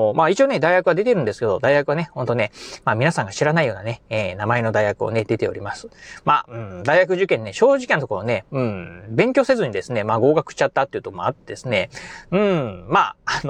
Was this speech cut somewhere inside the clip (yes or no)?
no